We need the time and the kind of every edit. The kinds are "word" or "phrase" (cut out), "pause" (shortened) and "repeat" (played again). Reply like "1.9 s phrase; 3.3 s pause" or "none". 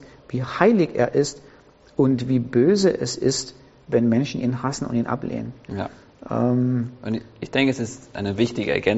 none